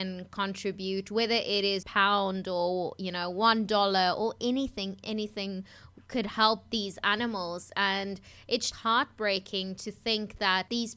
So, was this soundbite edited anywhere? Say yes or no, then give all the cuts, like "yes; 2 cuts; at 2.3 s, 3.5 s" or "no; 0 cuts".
yes; 3 cuts; at 1.8 s, 5.0 s, 8.7 s